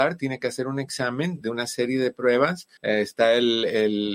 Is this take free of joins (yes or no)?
no